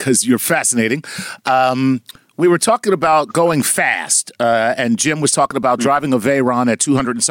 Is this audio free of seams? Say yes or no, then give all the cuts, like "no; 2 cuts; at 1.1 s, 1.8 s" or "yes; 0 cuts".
yes; 0 cuts